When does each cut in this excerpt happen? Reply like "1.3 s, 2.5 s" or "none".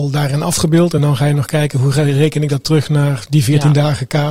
none